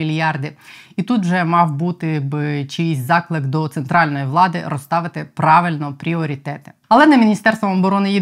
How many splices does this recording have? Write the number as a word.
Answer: zero